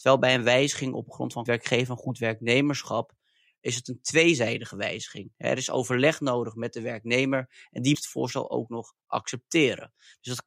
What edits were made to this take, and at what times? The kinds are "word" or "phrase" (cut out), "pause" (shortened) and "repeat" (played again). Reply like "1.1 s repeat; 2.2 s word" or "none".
1.5 s word; 7.9 s word